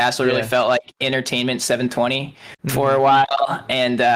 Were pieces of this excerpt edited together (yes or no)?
no